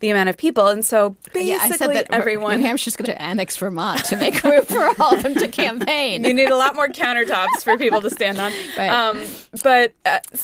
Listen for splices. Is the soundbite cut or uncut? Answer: cut